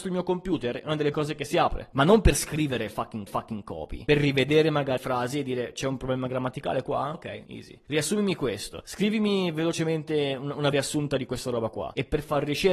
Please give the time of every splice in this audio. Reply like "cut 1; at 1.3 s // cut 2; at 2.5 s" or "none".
cut 1; at 1.1 s // cut 2; at 3.3 s // cut 3; at 5.0 s // cut 4; at 7.1 s // cut 5; at 10.7 s